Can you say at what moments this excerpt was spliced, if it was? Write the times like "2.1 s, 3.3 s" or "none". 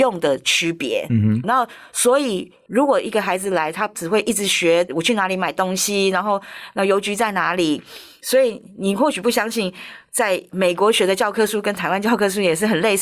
1.4 s

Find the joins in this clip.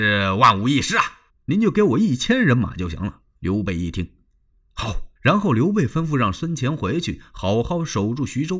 1.3 s, 3.4 s, 5.2 s

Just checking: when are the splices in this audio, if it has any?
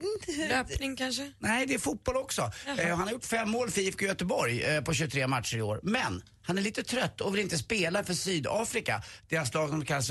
none

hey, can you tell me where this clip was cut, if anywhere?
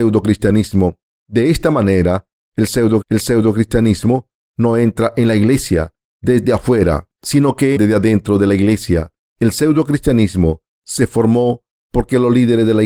3.0 s, 7.2 s, 7.8 s

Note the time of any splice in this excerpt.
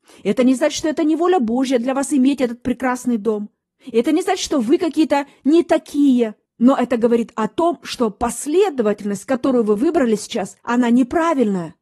10.6 s

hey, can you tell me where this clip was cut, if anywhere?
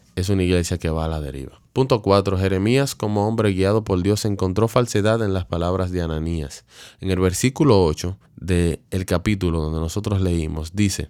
1.7 s, 8.3 s

